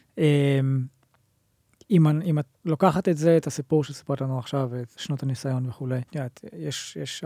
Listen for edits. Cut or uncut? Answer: cut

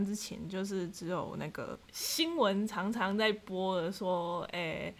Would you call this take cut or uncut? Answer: cut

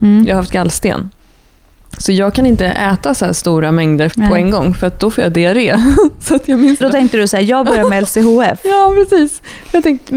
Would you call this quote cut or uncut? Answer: cut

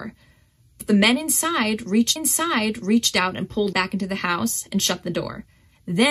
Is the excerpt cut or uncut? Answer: cut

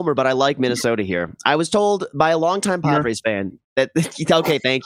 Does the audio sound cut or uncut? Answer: cut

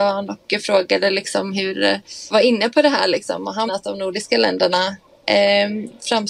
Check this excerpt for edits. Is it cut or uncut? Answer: cut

